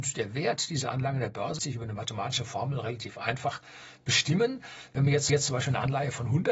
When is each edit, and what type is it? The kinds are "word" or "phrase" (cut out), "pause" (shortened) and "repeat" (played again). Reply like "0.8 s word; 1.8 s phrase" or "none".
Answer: 1.6 s word; 5.3 s repeat